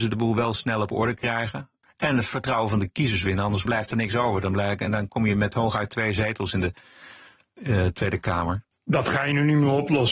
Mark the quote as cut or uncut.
uncut